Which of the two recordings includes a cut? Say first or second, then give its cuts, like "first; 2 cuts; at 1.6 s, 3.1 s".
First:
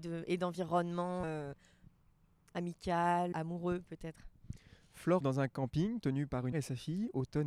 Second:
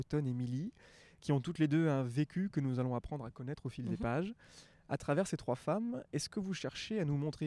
first; 4 cuts; at 1.2 s, 3.3 s, 5.2 s, 6.5 s